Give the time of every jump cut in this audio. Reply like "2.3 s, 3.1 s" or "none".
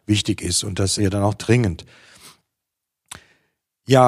1.0 s